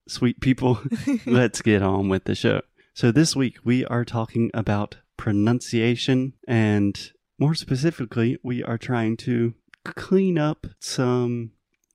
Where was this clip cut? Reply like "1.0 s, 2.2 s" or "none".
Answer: 2.8 s, 6.4 s, 9.7 s, 10.8 s